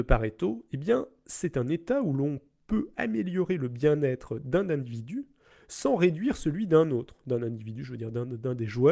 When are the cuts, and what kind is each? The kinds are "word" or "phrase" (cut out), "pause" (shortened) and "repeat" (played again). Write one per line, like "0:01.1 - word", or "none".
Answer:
none

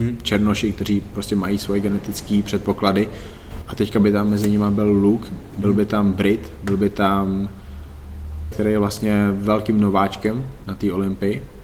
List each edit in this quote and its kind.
0:08.5 - word

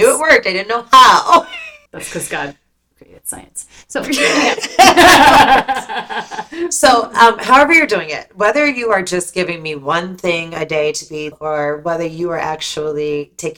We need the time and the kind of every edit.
0:01.9 - pause
0:02.9 - word
0:11.3 - word

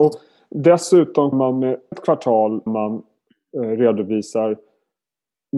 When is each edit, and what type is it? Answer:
0:01.3 - word
0:01.9 - word
0:02.7 - word

